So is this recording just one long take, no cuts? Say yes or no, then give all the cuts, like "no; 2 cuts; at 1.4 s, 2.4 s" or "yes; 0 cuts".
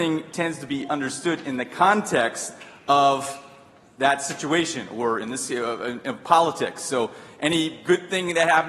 yes; 0 cuts